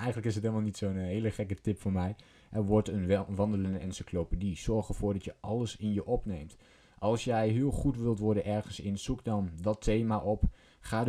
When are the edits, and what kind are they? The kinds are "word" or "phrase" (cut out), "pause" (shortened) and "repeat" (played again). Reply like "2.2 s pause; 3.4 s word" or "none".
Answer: none

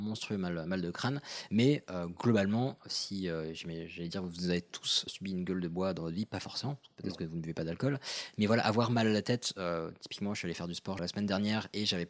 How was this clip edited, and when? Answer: 5.1 s word; 11.0 s word

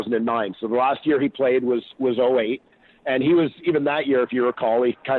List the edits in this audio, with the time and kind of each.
none

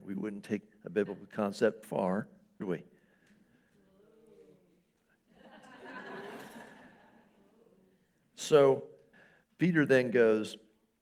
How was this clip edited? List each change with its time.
1.8 s word; 2.6 s word; 9.1 s word

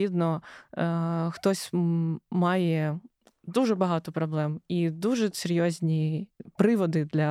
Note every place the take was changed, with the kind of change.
none

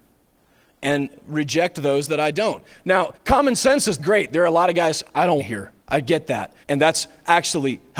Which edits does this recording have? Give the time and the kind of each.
3.1 s pause; 4.0 s word; 5.4 s word; 5.8 s pause; 6.6 s pause

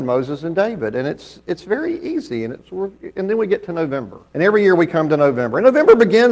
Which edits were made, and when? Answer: 4.3 s pause

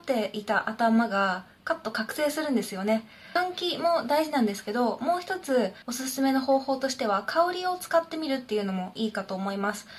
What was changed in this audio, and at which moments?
5.8 s pause

